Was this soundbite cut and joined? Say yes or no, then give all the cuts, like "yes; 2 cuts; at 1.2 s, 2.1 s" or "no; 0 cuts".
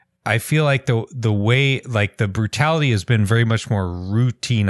no; 0 cuts